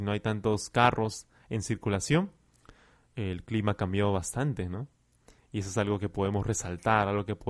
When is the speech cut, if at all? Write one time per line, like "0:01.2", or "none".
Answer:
none